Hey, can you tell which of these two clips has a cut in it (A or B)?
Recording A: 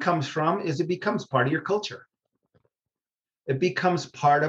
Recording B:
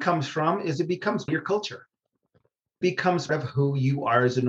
B